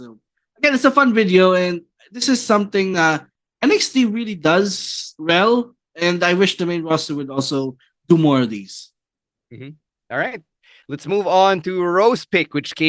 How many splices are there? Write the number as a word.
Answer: zero